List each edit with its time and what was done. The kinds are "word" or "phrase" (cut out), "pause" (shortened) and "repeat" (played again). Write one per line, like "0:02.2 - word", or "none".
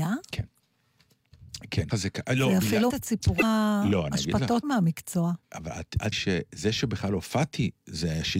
0:01.9 - word
0:02.9 - word
0:04.6 - word
0:05.4 - pause
0:06.1 - word